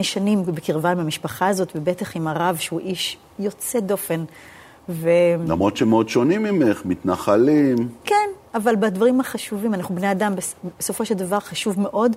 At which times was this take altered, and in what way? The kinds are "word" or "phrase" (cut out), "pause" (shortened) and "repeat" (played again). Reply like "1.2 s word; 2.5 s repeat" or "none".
none